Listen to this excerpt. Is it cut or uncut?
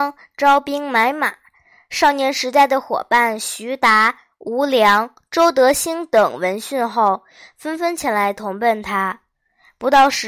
uncut